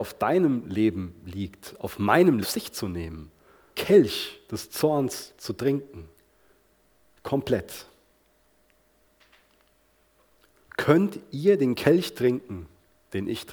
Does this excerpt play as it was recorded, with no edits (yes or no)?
no